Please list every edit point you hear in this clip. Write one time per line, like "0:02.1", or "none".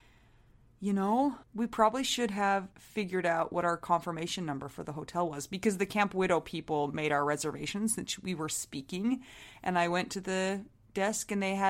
0:01.4
0:02.7